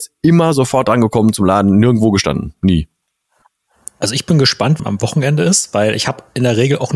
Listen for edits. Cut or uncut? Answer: cut